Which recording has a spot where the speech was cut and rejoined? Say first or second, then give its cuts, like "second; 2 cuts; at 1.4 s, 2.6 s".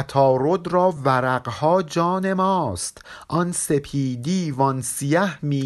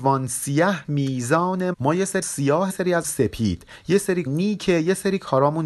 second; 5 cuts; at 1.7 s, 2.2 s, 2.7 s, 3.0 s, 4.3 s